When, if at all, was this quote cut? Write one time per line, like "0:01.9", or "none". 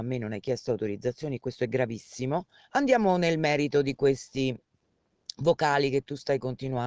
0:02.6